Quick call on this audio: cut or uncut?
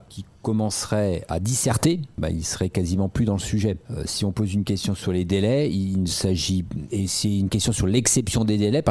cut